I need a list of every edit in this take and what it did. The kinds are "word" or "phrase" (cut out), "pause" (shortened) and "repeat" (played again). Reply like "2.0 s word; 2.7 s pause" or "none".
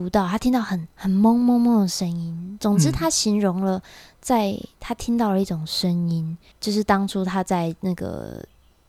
0.9 s pause; 6.5 s pause